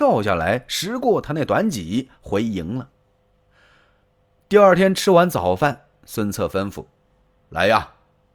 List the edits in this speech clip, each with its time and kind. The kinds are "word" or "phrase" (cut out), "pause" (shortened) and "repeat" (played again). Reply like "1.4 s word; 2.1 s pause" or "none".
none